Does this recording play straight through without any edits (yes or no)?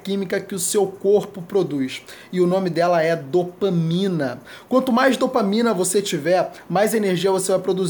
yes